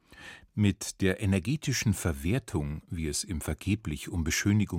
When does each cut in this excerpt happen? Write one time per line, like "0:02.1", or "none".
none